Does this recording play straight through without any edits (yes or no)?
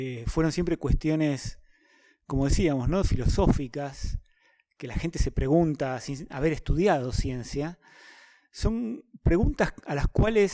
yes